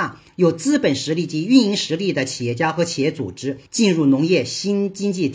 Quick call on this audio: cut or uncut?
cut